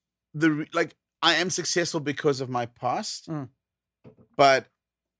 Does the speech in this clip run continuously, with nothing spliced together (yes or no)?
yes